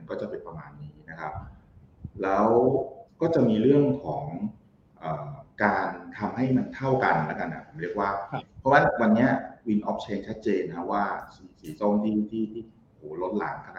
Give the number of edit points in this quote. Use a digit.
0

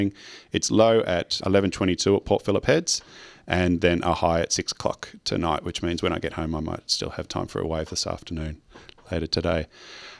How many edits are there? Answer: 1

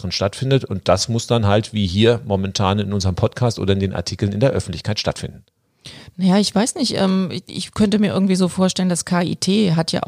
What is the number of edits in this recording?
0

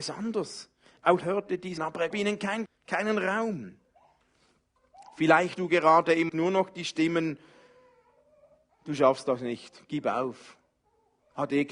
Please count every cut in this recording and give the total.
6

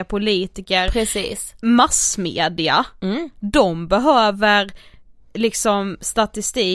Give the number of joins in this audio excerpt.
0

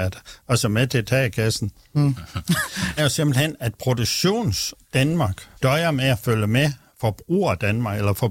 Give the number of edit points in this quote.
2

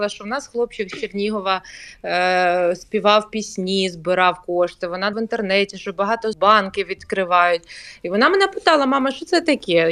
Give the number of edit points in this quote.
2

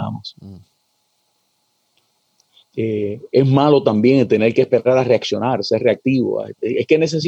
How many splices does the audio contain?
0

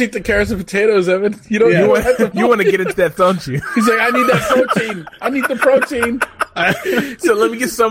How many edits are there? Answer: 2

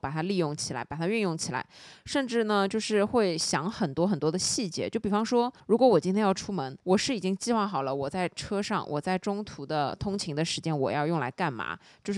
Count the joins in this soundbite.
2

